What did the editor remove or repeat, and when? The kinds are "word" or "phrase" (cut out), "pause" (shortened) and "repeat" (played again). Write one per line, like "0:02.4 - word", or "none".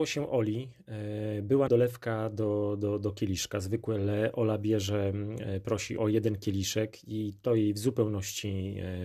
0:01.7 - word
0:06.0 - word